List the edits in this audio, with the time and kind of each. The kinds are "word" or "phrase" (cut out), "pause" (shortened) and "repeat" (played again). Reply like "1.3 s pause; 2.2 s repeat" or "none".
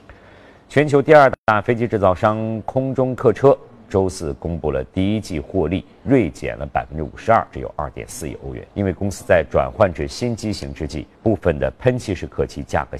8.7 s pause; 11.1 s pause